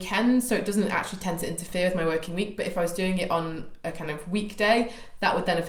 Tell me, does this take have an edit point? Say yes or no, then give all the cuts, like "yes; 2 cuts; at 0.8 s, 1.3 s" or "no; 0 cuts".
no; 0 cuts